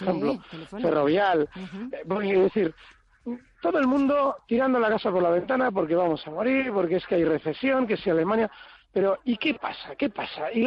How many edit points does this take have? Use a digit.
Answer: 0